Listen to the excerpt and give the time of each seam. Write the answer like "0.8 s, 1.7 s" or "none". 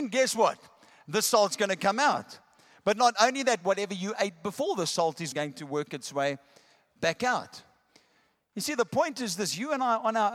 5.3 s